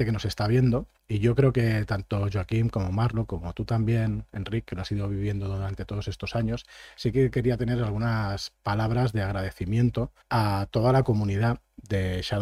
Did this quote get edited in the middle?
yes; 2 cuts; at 1.0 s, 10.2 s

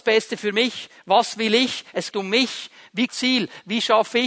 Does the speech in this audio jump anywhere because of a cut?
yes; 2 cuts; at 2.1 s, 3.1 s

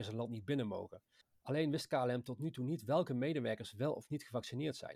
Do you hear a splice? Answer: yes; 1 cut; at 1.2 s

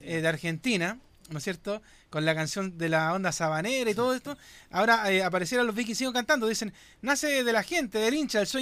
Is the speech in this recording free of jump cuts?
yes; 0 cuts

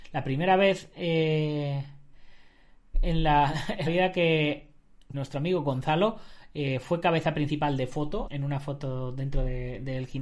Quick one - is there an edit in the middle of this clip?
yes; 4 cuts; at 2.9 s, 3.9 s, 5.1 s, 8.3 s

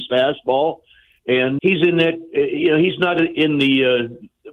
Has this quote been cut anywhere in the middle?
yes; 1 cut; at 1.6 s

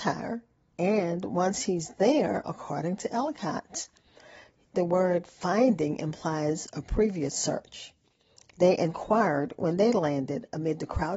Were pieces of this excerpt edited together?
no; 0 cuts

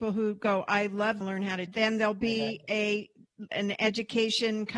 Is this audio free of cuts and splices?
no; 3 cuts; at 1.2 s, 1.7 s, 3.5 s

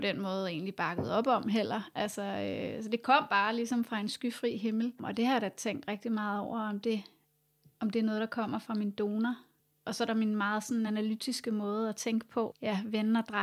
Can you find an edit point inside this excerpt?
no; 0 cuts

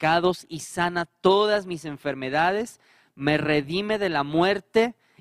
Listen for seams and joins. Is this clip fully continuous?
yes; 0 cuts

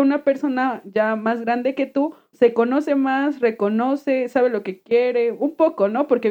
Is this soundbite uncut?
no; 1 cut; at 2.3 s

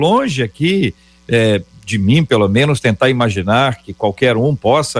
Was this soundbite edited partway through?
no; 0 cuts

